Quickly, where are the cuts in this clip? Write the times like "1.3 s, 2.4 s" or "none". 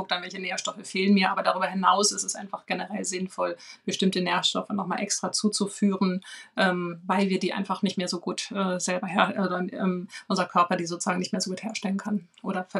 none